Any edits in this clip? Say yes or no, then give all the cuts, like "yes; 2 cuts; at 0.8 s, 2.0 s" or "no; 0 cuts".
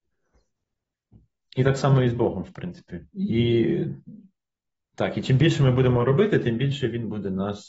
yes; 1 cut; at 3.1 s